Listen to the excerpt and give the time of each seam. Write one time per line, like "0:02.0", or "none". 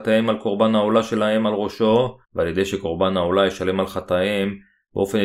0:02.2